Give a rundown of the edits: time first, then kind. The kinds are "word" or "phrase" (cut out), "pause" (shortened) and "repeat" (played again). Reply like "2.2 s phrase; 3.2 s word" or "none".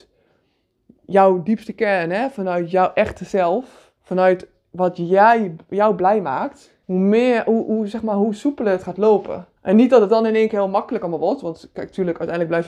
4.0 s pause; 6.8 s pause; 9.6 s pause